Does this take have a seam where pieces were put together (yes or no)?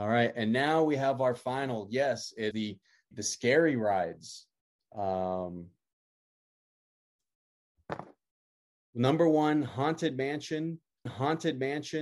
yes